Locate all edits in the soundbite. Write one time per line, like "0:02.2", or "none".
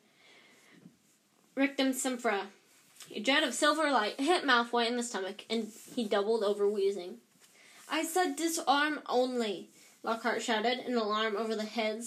none